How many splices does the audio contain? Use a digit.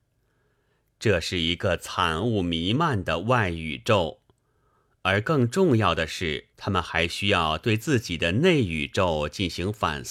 1